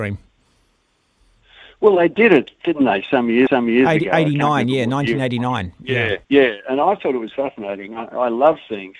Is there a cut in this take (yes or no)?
yes